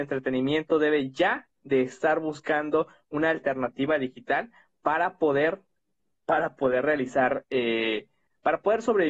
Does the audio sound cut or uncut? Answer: uncut